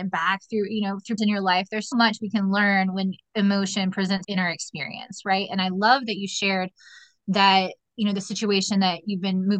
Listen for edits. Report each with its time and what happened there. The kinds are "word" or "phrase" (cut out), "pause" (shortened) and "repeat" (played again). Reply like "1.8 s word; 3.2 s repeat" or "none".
1.2 s word; 1.9 s word; 3.3 s word; 4.2 s word